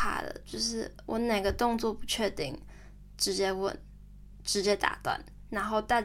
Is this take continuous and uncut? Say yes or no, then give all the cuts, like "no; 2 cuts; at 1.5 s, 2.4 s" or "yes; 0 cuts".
yes; 0 cuts